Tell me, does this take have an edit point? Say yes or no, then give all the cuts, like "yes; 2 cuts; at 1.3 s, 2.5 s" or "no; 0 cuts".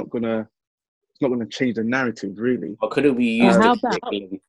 no; 0 cuts